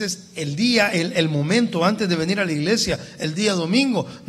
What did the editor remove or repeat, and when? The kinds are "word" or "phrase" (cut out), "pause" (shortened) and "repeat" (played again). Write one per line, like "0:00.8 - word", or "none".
none